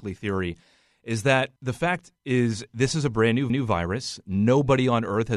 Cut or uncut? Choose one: cut